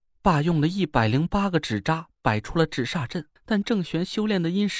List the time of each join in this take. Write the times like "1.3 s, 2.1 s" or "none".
3.4 s